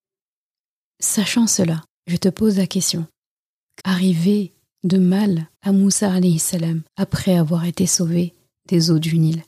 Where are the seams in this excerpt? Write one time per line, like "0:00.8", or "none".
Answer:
0:03.8
0:05.5
0:06.9